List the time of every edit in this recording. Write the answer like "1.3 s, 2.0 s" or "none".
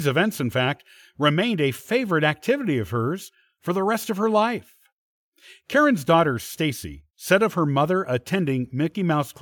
none